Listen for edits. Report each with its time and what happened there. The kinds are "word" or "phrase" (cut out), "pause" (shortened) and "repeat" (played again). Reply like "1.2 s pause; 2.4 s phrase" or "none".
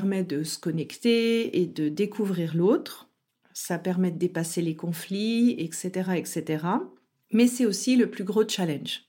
none